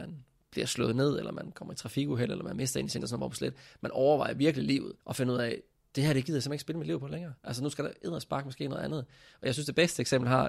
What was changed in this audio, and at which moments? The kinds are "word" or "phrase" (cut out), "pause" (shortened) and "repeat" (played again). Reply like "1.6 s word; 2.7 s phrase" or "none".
3.0 s word; 5.0 s pause; 7.4 s pause